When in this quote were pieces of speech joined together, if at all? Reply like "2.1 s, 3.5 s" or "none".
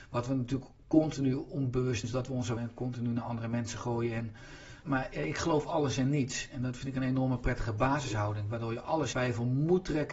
2.0 s, 2.6 s, 4.8 s, 9.1 s